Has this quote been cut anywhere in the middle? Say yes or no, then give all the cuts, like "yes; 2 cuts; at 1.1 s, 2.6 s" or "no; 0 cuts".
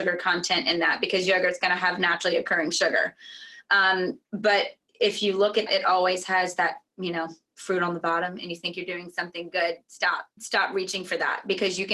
yes; 3 cuts; at 4.3 s, 5.7 s, 10.4 s